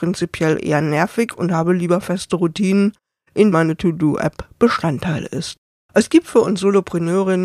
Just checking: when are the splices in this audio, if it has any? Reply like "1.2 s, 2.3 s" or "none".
3.5 s, 5.7 s